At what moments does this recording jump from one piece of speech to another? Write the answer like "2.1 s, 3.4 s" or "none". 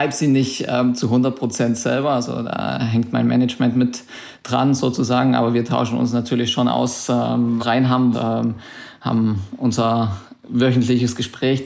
7.6 s, 8.1 s